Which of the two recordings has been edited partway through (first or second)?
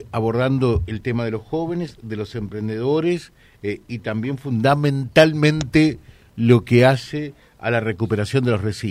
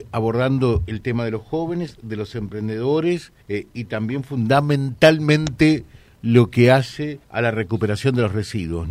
second